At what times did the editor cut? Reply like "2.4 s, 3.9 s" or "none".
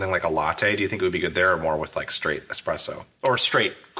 none